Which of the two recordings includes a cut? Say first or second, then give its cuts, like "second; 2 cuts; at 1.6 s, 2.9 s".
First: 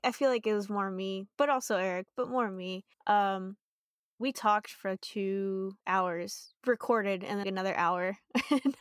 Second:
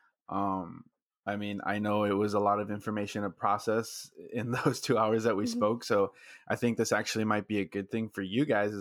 first; 3 cuts; at 2.9 s, 5.8 s, 7.4 s